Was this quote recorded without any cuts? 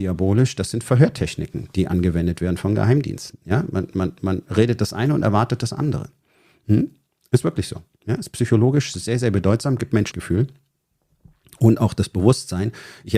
no; 1 cut; at 10.1 s

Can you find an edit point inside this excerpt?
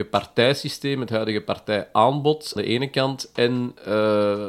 yes; 1 cut; at 2.6 s

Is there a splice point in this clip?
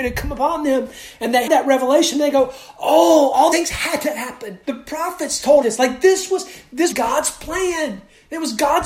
yes; 5 cuts; at 1.5 s, 3.5 s, 4.6 s, 5.6 s, 6.9 s

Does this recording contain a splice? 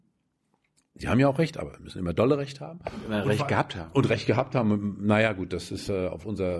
no; 0 cuts

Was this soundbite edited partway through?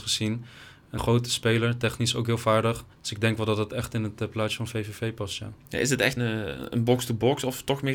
yes; 3 cuts; at 1.0 s, 2.9 s, 6.2 s

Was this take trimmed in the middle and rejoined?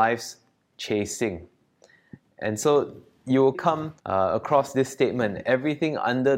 yes; 2 cuts; at 3.5 s, 4.0 s

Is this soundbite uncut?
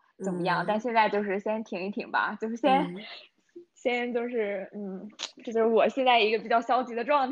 yes; 0 cuts

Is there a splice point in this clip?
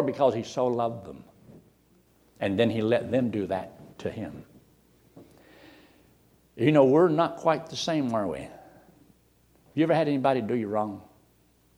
no; 0 cuts

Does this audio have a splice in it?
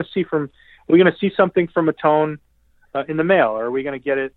no; 0 cuts

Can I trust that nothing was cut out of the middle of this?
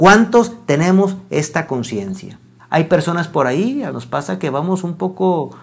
no; 2 cuts; at 2.6 s, 3.9 s

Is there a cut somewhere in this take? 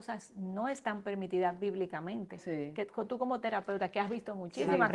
no; 0 cuts

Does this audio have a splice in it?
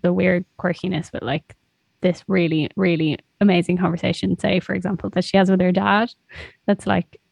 yes; 1 cut; at 2.7 s

